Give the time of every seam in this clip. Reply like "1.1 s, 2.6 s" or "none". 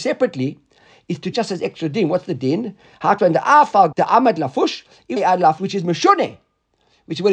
1.3 s, 3.2 s, 3.9 s, 5.2 s, 5.6 s